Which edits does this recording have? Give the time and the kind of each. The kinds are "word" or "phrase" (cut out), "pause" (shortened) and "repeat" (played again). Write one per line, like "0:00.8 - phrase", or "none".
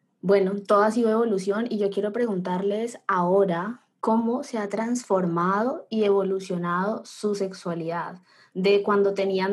none